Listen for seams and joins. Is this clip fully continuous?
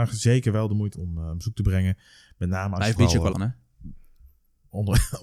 no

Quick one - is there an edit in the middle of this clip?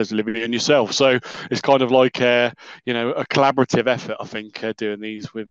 no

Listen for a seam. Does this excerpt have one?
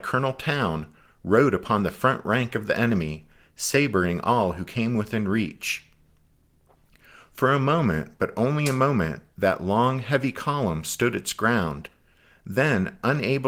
no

